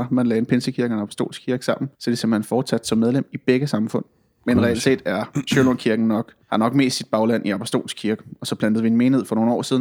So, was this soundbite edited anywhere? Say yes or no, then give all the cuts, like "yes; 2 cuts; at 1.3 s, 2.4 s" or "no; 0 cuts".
yes; 2 cuts; at 1.9 s, 6.4 s